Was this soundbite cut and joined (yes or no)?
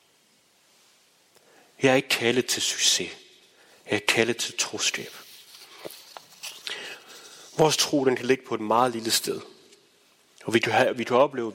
no